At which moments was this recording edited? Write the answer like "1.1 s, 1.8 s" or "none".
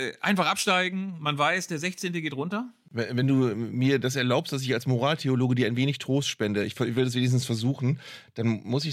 none